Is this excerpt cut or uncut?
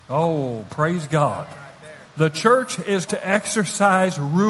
cut